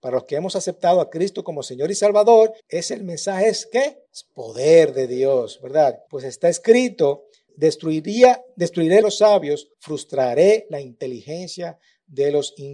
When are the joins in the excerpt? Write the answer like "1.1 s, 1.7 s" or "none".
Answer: 2.6 s, 4.1 s, 6.1 s, 7.5 s, 9.0 s, 9.7 s